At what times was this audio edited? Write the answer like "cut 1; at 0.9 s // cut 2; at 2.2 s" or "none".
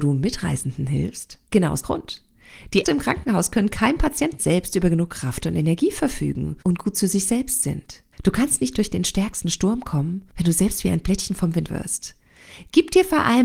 cut 1; at 1.5 s // cut 2; at 1.8 s // cut 3; at 2.8 s // cut 4; at 4.4 s // cut 5; at 6.6 s // cut 6; at 8.1 s // cut 7; at 11.7 s